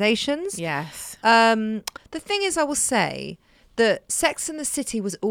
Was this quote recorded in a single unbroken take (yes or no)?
yes